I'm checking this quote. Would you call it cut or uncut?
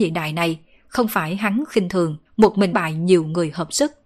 cut